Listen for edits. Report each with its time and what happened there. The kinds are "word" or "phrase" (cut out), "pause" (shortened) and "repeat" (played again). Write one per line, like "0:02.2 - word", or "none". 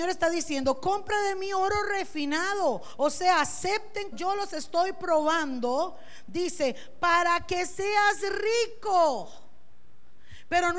0:04.1 - word